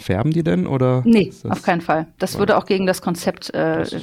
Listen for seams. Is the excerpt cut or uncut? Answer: uncut